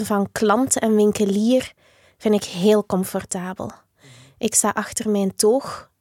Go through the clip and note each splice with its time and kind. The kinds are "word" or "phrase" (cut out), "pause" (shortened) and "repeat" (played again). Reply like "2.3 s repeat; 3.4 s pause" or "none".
none

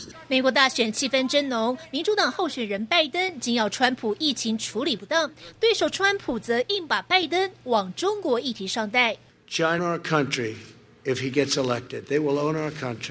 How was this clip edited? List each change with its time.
9.8 s phrase

